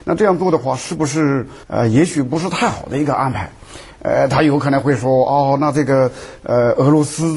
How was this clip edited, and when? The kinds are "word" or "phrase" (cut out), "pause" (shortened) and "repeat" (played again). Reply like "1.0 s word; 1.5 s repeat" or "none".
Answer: 1.6 s pause